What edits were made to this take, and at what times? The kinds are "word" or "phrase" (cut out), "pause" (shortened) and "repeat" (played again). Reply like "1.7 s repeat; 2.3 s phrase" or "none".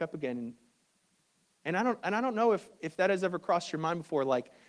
none